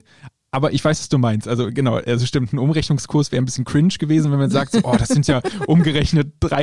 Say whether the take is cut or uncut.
uncut